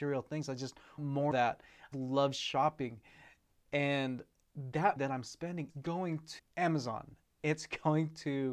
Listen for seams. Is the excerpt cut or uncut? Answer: cut